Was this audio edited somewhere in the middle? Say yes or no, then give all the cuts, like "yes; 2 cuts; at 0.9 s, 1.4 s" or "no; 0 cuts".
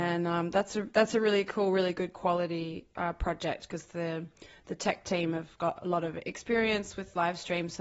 no; 0 cuts